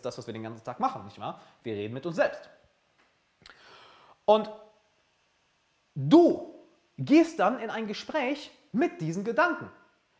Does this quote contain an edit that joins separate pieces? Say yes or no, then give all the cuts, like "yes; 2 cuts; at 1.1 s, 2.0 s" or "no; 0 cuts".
no; 0 cuts